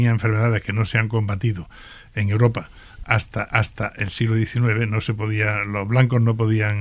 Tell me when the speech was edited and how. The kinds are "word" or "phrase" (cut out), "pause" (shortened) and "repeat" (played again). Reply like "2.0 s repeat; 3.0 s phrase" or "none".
3.5 s repeat